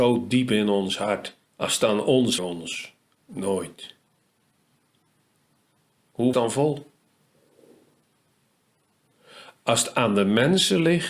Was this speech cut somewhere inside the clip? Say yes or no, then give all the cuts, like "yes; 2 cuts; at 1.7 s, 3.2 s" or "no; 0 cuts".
yes; 3 cuts; at 1.4 s, 2.4 s, 6.3 s